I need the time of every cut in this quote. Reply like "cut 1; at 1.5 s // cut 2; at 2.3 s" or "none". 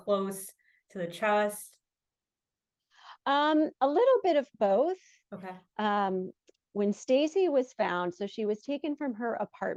none